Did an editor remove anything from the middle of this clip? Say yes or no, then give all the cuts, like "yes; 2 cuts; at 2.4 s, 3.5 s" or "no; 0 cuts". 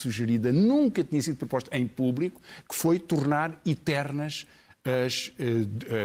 no; 0 cuts